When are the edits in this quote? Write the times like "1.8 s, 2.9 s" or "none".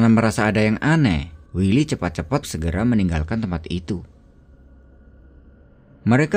1.5 s, 2.4 s

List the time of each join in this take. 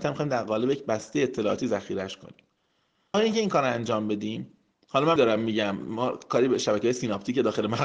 3.1 s, 4.7 s, 5.2 s

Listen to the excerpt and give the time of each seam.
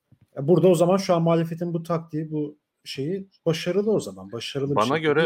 none

